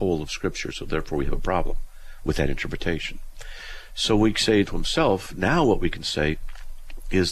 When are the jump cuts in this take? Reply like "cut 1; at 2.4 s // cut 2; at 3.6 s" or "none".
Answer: cut 1; at 4.7 s